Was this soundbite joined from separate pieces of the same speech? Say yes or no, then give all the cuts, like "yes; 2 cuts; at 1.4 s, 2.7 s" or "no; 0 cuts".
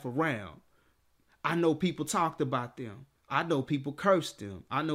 yes; 1 cut; at 3.2 s